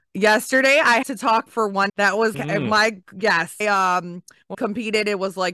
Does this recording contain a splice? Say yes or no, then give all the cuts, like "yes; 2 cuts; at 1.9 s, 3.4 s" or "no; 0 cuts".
yes; 6 cuts; at 1.0 s, 1.5 s, 1.9 s, 2.3 s, 3.6 s, 4.5 s